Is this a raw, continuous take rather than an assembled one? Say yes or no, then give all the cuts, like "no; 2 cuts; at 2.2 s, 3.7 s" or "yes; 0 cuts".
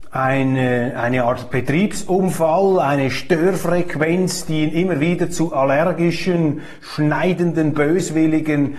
yes; 0 cuts